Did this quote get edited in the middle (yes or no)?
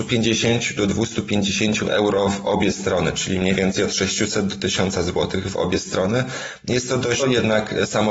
yes